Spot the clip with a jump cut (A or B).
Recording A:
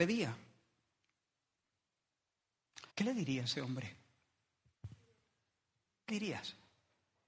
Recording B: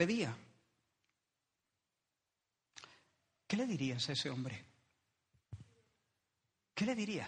A